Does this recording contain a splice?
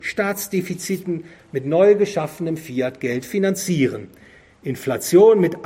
no; 0 cuts

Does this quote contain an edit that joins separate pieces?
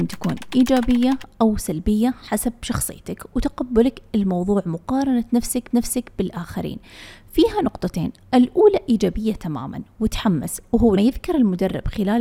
yes; 2 cuts; at 5.7 s, 11.0 s

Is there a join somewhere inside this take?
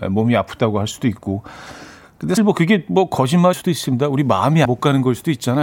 yes; 3 cuts; at 2.4 s, 3.5 s, 4.6 s

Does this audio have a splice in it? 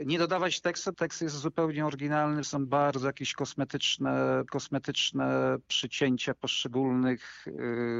yes; 3 cuts; at 0.9 s, 2.4 s, 4.5 s

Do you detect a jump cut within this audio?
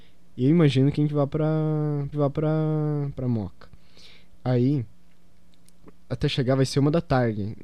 yes; 2 cuts; at 2.1 s, 6.1 s

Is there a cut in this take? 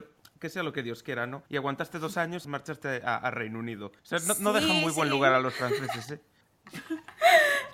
yes; 3 cuts; at 1.5 s, 2.4 s, 4.0 s

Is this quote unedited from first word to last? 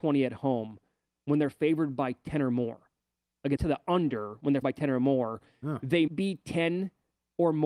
no; 3 cuts; at 3.6 s, 4.6 s, 6.1 s

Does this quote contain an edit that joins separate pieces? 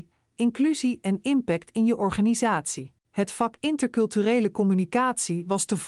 yes; 1 cut; at 3.0 s

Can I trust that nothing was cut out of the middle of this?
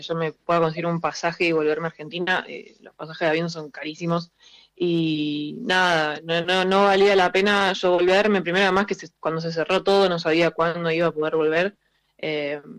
yes; 0 cuts

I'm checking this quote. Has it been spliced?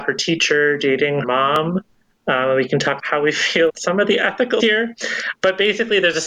yes; 4 cuts; at 1.2 s, 3.0 s, 3.7 s, 4.6 s

